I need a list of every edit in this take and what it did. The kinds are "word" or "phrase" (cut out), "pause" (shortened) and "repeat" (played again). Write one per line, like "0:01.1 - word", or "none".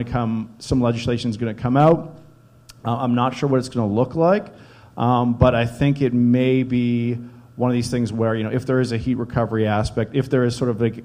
none